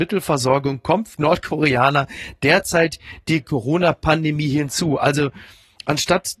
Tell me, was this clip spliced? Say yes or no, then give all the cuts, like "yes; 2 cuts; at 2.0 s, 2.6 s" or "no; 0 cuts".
yes; 2 cuts; at 1.1 s, 3.4 s